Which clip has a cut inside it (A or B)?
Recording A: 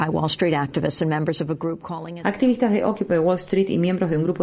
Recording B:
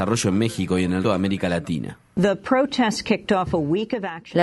B